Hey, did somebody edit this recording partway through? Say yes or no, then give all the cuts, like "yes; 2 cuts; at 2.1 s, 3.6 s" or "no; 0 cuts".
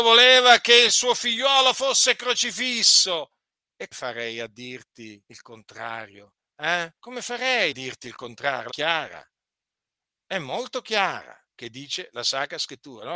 yes; 6 cuts; at 3.9 s, 5.2 s, 7.0 s, 7.7 s, 8.7 s, 11.5 s